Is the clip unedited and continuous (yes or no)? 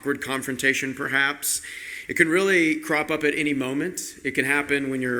yes